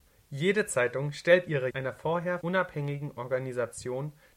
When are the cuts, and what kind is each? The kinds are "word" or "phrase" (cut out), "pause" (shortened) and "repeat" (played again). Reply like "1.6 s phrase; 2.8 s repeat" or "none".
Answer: 1.7 s word; 2.4 s word